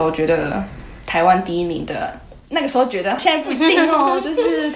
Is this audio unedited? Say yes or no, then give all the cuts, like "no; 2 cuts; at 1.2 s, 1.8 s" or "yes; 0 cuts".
no; 1 cut; at 3.2 s